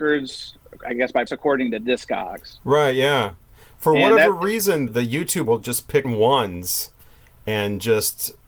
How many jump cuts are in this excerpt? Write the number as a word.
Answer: four